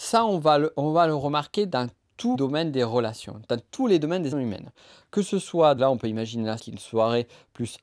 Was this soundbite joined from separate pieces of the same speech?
yes; 4 cuts; at 2.3 s, 4.3 s, 5.8 s, 6.6 s

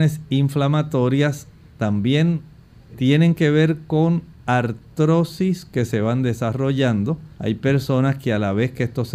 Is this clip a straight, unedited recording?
no; 2 cuts; at 2.9 s, 7.3 s

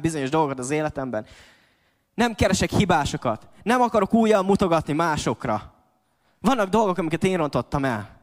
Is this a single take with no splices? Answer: yes; 0 cuts

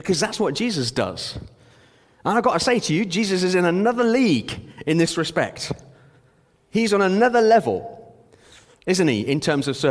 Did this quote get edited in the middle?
no; 0 cuts

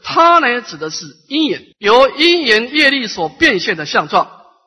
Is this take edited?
yes; 1 cut; at 1.7 s

